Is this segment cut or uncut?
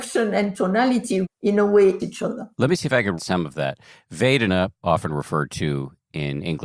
cut